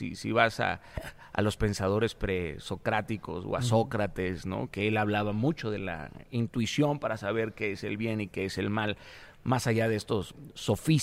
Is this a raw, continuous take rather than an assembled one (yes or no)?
yes